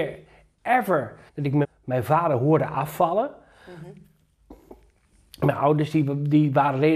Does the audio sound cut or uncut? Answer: cut